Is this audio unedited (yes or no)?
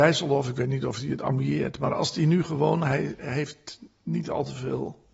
yes